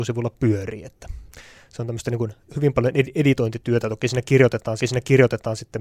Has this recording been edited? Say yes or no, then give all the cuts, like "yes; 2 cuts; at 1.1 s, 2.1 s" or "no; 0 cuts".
yes; 1 cut; at 4.8 s